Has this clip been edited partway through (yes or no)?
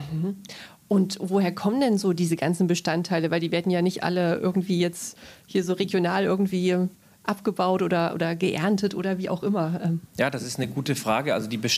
no